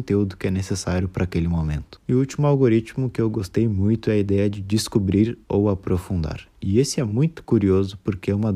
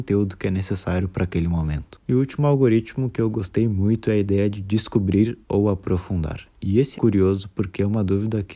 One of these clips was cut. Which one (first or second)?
second